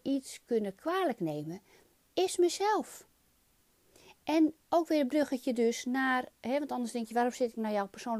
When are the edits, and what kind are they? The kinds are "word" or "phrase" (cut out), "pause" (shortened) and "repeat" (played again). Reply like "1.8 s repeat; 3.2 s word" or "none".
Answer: none